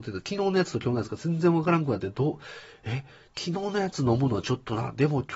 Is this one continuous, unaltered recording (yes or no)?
yes